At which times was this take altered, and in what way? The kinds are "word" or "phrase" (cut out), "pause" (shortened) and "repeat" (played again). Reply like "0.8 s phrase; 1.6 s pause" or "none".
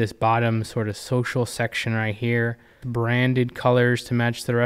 2.8 s word